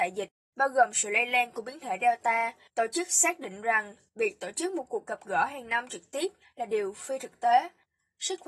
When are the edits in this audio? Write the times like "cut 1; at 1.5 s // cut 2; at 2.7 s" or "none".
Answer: none